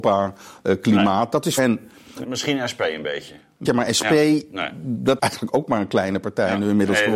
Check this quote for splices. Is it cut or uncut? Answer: cut